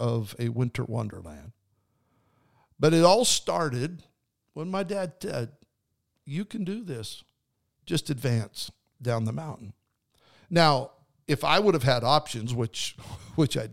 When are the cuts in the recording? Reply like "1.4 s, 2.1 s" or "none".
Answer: none